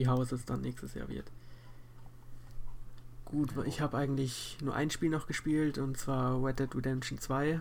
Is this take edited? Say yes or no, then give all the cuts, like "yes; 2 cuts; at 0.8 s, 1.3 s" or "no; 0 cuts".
no; 0 cuts